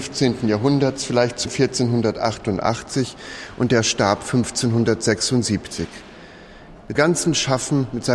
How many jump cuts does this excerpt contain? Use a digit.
2